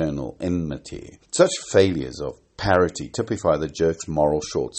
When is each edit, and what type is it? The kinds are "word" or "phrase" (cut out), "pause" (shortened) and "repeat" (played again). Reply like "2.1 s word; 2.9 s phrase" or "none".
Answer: 1.2 s pause